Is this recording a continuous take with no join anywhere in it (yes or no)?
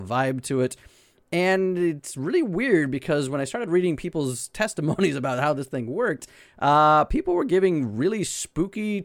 yes